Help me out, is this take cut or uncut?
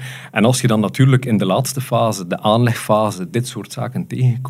uncut